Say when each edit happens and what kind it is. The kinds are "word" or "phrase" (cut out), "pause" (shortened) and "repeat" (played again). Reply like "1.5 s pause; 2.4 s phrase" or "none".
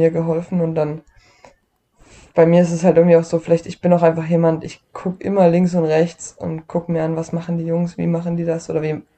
none